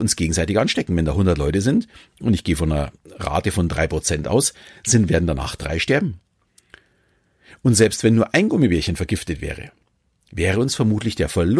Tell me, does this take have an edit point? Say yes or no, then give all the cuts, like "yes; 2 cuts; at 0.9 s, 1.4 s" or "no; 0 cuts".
no; 0 cuts